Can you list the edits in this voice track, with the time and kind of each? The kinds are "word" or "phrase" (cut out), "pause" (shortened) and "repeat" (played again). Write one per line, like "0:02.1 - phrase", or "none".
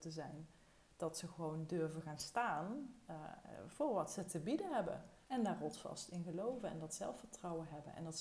0:05.2 - pause

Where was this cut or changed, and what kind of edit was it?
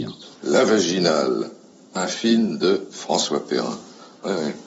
none

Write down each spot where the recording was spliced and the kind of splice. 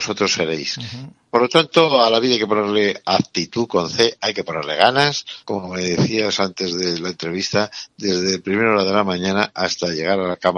0:05.4 - pause

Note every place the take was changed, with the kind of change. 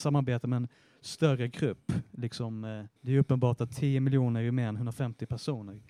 0:03.0 - pause

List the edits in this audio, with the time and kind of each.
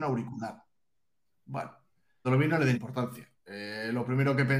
0:02.2 - word
0:02.7 - word
0:03.4 - pause

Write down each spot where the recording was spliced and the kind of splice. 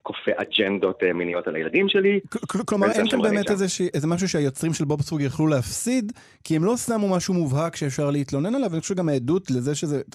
0:02.9 - word
0:03.9 - word

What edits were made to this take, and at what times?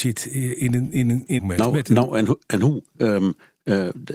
0:01.4 - phrase

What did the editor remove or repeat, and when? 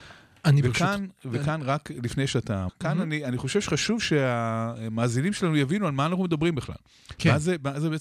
0:02.7 - word

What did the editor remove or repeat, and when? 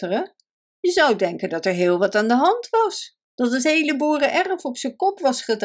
0:03.2 - pause

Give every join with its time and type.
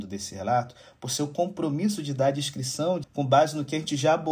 0:03.0 - word

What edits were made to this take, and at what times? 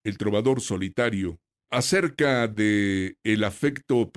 0:01.7 - word

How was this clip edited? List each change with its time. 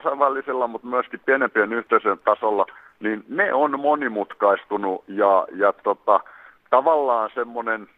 none

